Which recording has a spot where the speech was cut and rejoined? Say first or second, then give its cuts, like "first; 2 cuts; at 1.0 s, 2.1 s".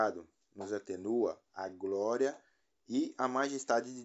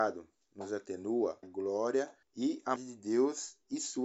second; 3 cuts; at 1.4 s, 2.2 s, 2.8 s